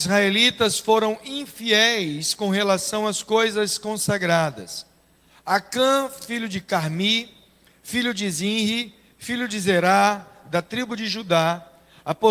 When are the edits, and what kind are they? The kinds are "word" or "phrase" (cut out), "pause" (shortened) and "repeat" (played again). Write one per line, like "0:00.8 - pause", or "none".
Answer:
none